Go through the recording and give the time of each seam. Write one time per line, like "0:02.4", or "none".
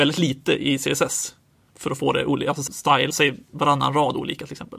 0:02.7
0:03.1